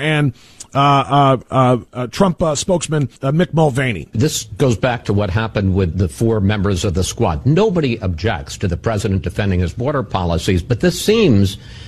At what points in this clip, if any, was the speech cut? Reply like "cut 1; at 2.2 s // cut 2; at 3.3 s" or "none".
cut 1; at 1.9 s // cut 2; at 3.2 s // cut 3; at 5.9 s